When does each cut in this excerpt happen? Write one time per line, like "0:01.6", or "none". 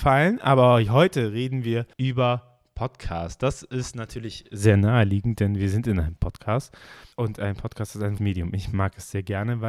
0:01.9
0:07.1
0:08.2